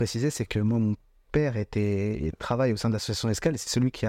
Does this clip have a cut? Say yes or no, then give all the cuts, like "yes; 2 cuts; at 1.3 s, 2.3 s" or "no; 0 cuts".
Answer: no; 0 cuts